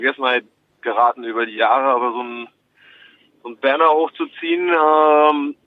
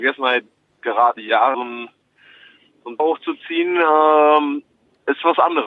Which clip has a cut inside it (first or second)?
second